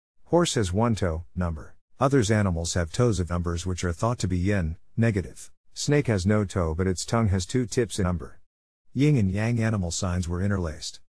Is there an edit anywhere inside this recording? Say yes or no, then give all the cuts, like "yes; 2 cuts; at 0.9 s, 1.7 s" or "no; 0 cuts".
yes; 5 cuts; at 1.4 s, 1.9 s, 3.3 s, 5.6 s, 8.0 s